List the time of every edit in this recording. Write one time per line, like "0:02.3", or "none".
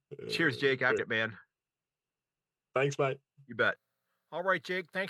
0:01.0